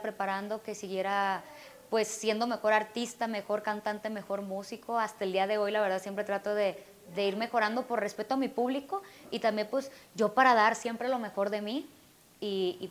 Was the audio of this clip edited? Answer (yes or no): no